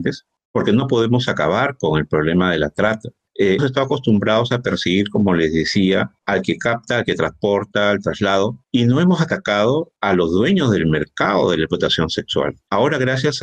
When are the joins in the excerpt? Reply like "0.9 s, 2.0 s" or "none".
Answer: 3.6 s